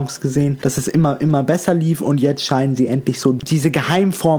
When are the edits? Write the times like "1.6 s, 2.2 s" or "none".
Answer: none